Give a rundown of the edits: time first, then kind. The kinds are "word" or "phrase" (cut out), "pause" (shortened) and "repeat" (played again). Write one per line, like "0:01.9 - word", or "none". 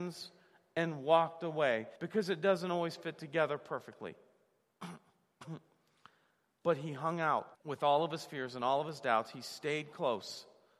0:02.0 - pause
0:07.5 - pause